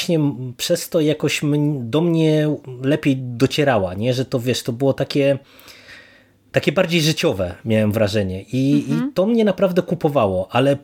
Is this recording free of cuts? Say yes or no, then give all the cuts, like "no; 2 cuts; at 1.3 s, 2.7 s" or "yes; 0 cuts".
yes; 0 cuts